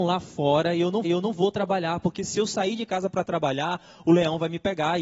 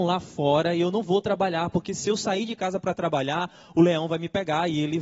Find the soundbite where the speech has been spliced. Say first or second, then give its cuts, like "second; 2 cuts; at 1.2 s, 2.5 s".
first; 1 cut; at 1.0 s